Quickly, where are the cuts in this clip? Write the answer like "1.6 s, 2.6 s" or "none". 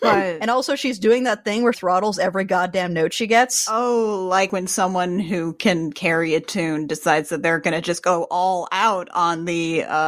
1.7 s